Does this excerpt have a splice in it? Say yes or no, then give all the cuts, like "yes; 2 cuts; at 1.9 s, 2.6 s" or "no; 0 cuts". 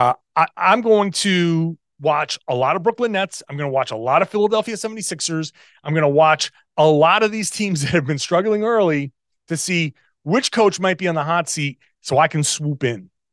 no; 0 cuts